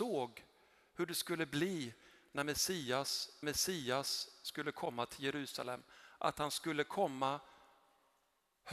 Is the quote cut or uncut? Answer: cut